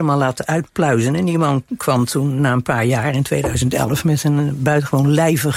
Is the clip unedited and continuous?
yes; 0 cuts

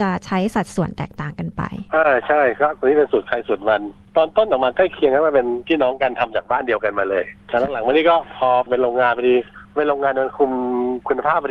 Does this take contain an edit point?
yes; 1 cut; at 7.4 s

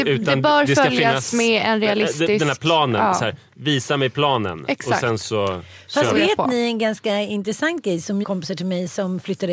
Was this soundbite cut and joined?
yes; 1 cut; at 8.2 s

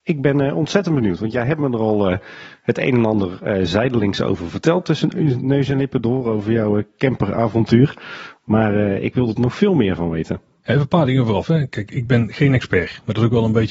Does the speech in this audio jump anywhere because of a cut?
no; 0 cuts

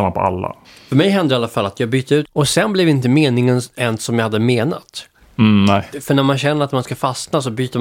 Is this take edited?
yes; 1 cut; at 2.3 s

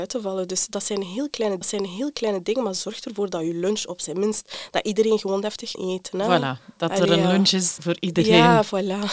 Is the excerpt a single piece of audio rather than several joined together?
no; 3 cuts; at 1.6 s, 5.7 s, 7.8 s

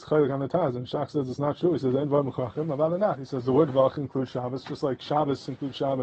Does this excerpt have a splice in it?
no; 0 cuts

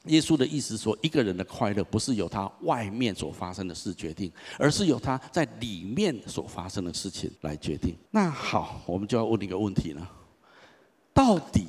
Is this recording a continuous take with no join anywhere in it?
no; 2 cuts; at 7.4 s, 8.1 s

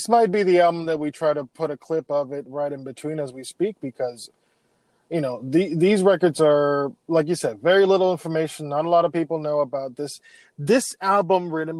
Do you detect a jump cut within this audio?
yes; 1 cut; at 7.0 s

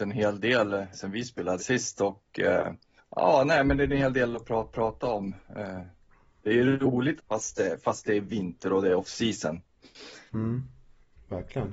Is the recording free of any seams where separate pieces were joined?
no; 5 cuts; at 0.9 s, 1.6 s, 3.0 s, 4.7 s, 7.2 s

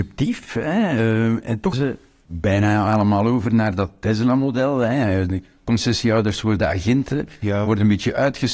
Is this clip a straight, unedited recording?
no; 1 cut; at 1.7 s

